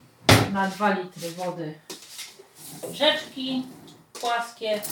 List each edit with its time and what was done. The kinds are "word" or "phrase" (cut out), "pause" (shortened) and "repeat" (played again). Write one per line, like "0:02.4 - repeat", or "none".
0:02.8 - word